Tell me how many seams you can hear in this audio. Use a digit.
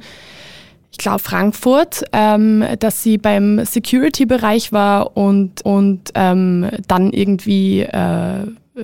2